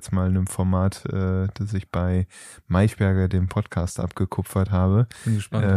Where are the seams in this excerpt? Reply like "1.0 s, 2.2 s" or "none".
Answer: none